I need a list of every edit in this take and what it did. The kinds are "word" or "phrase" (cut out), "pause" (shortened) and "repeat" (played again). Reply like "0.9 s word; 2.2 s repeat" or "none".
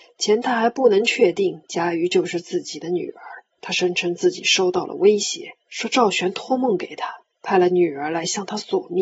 3.5 s pause; 5.6 s pause; 7.3 s pause